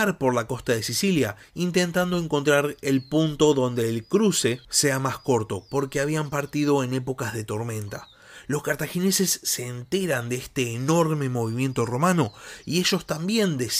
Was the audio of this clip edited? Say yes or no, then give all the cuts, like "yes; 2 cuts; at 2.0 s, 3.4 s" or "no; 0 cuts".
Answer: no; 0 cuts